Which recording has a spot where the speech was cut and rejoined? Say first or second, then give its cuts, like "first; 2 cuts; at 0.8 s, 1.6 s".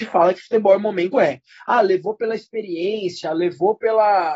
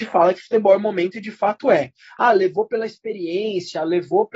first; 1 cut; at 1.1 s